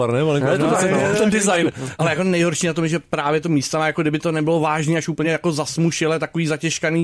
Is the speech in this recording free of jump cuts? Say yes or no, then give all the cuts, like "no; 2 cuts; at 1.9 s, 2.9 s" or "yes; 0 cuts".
yes; 0 cuts